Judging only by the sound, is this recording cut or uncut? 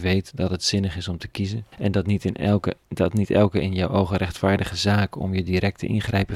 cut